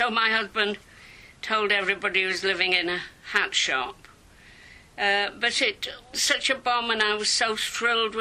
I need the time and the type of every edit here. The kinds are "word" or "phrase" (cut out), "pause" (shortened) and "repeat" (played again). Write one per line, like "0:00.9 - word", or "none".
0:06.1 - word